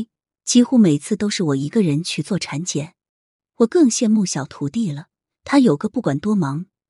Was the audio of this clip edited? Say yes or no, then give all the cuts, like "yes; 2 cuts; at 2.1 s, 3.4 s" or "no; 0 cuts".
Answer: no; 0 cuts